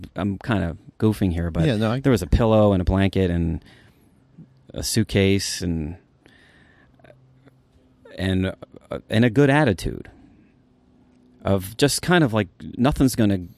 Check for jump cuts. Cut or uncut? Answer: uncut